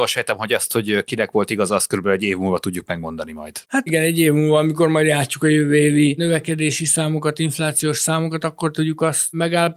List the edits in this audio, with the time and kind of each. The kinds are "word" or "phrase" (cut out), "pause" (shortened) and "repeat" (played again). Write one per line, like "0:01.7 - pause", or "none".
0:03.9 - phrase